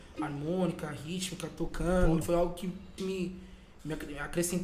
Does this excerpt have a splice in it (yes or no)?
yes